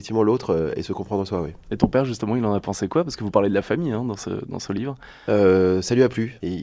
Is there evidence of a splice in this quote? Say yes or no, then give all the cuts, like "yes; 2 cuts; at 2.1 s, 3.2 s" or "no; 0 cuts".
no; 0 cuts